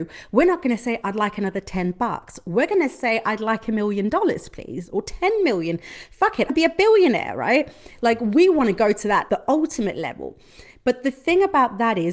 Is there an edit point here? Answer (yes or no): yes